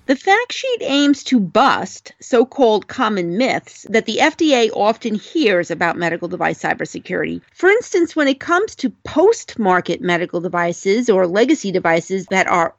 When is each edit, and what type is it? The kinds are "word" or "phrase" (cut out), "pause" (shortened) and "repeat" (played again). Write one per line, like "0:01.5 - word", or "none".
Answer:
none